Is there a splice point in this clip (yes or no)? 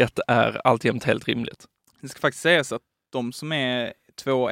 no